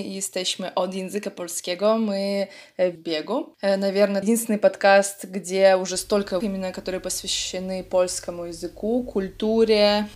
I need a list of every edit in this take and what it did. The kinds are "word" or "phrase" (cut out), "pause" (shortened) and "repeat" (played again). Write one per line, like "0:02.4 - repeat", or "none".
0:03.0 - phrase
0:04.2 - word
0:06.4 - word